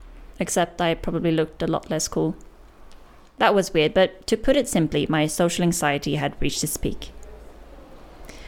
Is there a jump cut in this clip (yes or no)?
no